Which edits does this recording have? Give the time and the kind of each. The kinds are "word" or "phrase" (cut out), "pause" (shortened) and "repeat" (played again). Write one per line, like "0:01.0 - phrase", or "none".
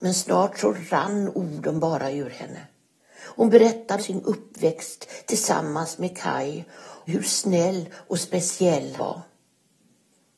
0:04.0 - word
0:07.1 - word
0:09.0 - word